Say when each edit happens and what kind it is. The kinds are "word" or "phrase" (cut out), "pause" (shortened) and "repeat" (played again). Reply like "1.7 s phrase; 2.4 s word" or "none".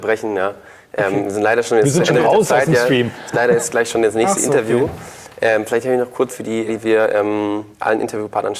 3.3 s word; 6.3 s word; 6.7 s word; 7.7 s pause